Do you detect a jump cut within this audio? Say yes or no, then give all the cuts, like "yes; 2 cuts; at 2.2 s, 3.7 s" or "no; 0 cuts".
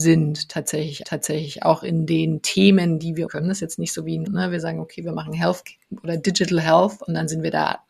yes; 3 cuts; at 1.0 s, 3.3 s, 4.3 s